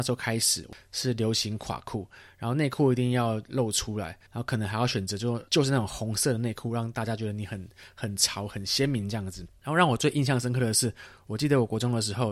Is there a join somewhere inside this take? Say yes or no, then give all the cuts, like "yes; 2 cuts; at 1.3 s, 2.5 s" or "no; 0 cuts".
yes; 2 cuts; at 4.3 s, 5.5 s